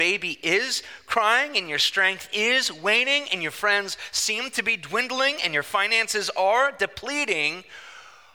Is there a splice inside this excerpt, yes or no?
no